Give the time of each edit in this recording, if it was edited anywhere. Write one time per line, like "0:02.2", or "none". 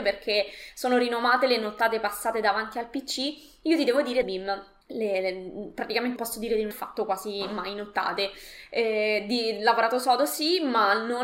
0:04.2
0:04.8
0:06.2
0:06.7